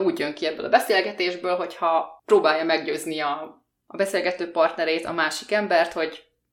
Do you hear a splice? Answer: yes; 1 cut; at 2.2 s

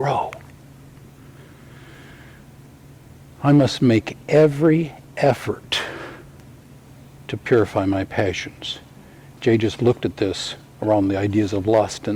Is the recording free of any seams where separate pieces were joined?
yes; 0 cuts

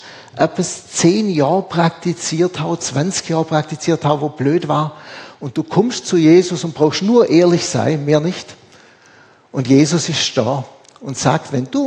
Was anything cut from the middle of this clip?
no; 0 cuts

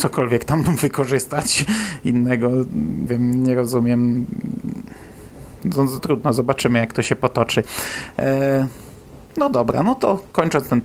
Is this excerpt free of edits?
no; 3 cuts; at 3.1 s, 6.0 s, 9.3 s

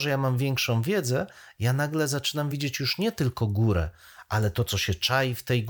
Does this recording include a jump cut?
no; 0 cuts

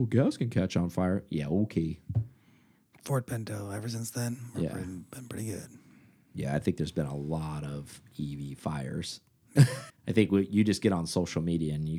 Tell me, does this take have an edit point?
yes; 1 cut; at 9.9 s

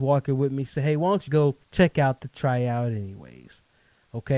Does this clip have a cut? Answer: yes; 2 cuts; at 1.3 s, 1.6 s

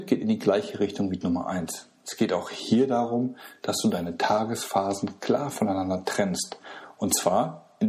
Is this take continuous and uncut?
no; 1 cut; at 1.2 s

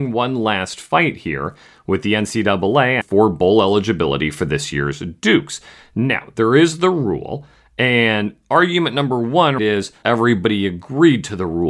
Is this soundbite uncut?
no; 3 cuts; at 3.0 s, 9.6 s, 10.0 s

